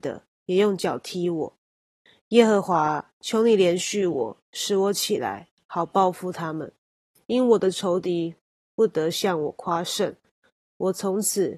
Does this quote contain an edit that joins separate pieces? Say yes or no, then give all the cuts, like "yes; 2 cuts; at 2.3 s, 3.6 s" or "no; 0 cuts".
no; 0 cuts